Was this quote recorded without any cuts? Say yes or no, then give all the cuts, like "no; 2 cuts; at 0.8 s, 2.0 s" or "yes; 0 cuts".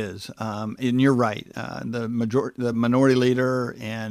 yes; 0 cuts